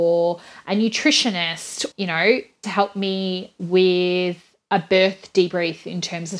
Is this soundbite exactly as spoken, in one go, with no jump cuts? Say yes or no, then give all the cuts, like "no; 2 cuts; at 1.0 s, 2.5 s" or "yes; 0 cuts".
no; 2 cuts; at 1.9 s, 2.6 s